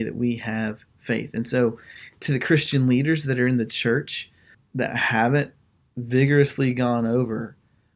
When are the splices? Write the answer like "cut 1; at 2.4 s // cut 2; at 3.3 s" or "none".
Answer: none